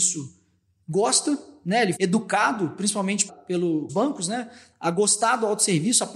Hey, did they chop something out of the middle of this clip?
yes; 3 cuts; at 2.0 s, 3.3 s, 3.9 s

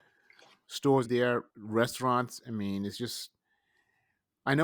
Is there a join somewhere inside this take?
yes; 2 cuts; at 1.0 s, 1.5 s

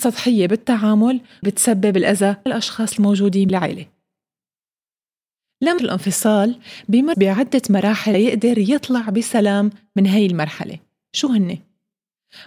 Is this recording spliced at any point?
yes; 6 cuts; at 1.4 s, 2.5 s, 3.5 s, 5.8 s, 7.1 s, 8.1 s

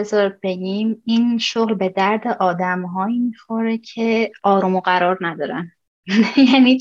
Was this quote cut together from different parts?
no; 0 cuts

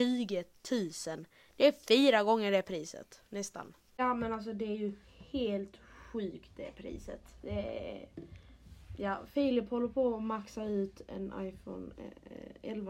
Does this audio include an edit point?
no; 0 cuts

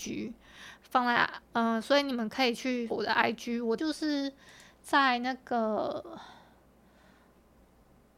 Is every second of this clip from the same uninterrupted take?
no; 2 cuts; at 2.9 s, 3.8 s

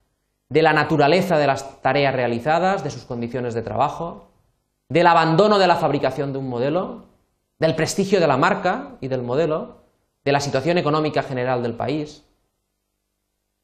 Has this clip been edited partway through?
no; 0 cuts

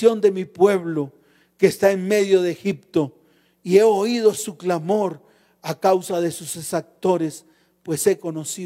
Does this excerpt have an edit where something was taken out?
no; 0 cuts

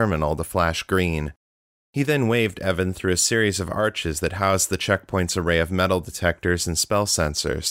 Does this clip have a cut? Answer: no; 0 cuts

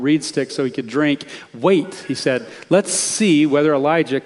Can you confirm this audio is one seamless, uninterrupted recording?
yes; 0 cuts

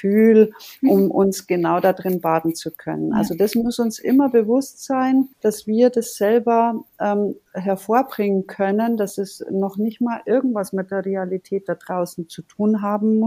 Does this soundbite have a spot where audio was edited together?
yes; 1 cut; at 5.3 s

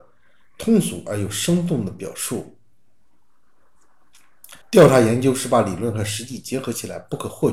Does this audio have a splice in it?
yes; 1 cut; at 4.6 s

